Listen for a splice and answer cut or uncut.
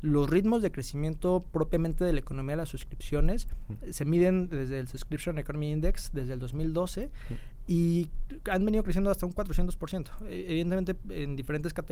uncut